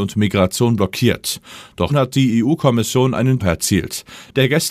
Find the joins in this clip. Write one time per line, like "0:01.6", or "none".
0:01.9
0:03.4